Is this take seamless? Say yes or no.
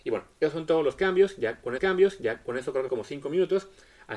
no